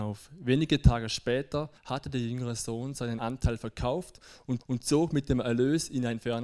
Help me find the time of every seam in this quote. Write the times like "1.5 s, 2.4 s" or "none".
1.8 s, 3.2 s, 4.6 s